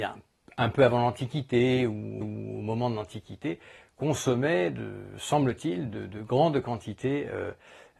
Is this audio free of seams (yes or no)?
no